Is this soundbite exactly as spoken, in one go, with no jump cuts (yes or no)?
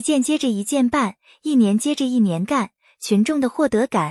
yes